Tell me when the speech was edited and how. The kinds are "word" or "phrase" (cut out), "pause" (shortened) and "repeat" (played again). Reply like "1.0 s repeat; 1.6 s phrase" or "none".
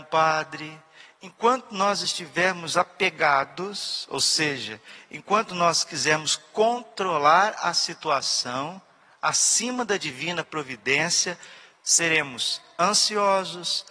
none